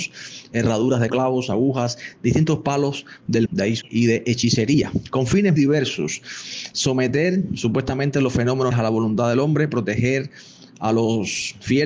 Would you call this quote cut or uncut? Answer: cut